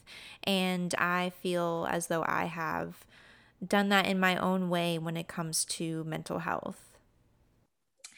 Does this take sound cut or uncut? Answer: uncut